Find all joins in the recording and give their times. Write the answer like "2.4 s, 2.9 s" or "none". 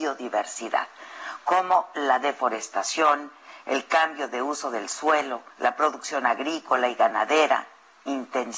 5.5 s